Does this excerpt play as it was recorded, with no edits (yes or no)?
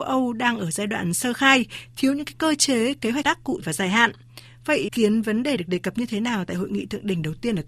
no